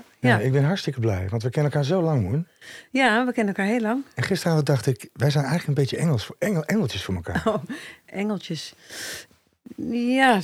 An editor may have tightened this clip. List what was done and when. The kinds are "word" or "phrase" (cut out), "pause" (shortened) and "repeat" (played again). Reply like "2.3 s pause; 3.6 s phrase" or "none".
8.0 s word